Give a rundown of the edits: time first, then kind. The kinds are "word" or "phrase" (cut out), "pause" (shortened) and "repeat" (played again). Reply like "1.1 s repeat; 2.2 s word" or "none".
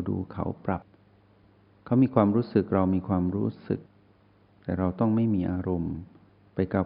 none